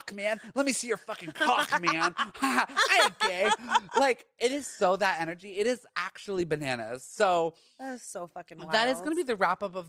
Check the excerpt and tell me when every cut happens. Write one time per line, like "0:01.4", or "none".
none

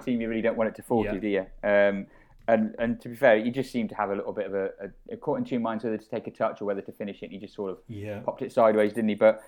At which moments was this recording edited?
none

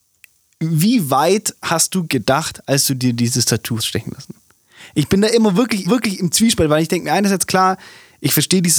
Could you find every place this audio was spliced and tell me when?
0:03.8
0:05.8

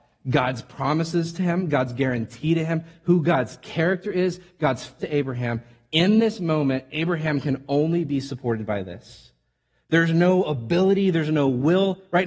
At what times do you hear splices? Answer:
0:05.0

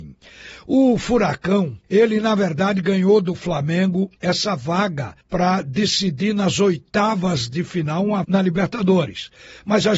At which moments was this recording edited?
0:01.8
0:04.2
0:05.2
0:08.2

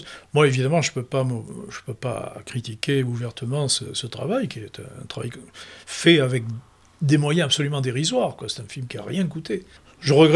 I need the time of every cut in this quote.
none

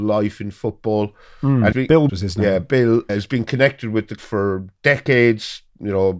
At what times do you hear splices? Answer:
0:01.7
0:02.1
0:03.1
0:04.2

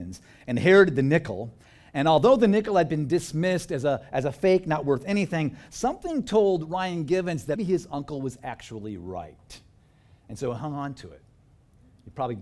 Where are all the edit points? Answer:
0:07.6

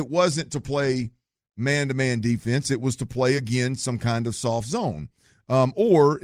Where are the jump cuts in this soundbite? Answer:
none

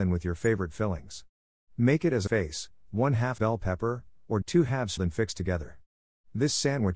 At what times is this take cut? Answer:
0:02.3
0:03.4
0:04.4
0:05.0

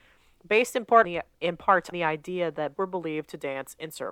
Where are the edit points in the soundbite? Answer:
0:01.0
0:01.9
0:02.8

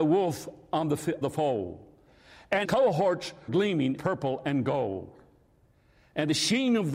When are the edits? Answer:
0:01.2
0:02.6
0:03.5
0:04.0

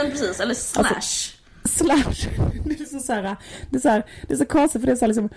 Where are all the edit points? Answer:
none

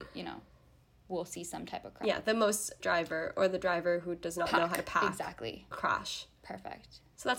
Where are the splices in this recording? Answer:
0:02.8
0:05.7

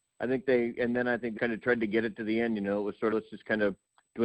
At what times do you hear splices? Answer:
0:01.4
0:03.1

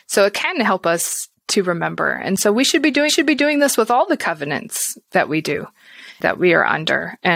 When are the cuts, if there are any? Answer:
0:03.1

